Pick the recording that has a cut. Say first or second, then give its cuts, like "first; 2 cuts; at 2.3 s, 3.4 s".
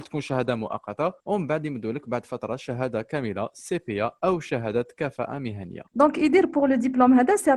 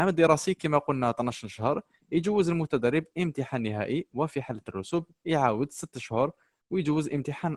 first; 2 cuts; at 1.2 s, 5.9 s